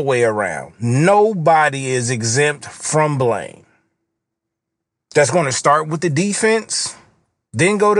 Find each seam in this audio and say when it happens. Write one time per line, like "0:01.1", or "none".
none